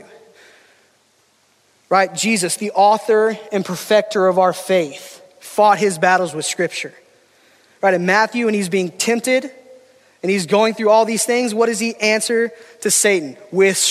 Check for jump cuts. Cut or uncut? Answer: uncut